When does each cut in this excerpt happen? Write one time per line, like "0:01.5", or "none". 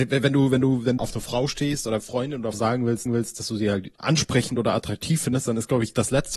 0:01.0
0:02.0
0:02.5
0:03.1
0:04.0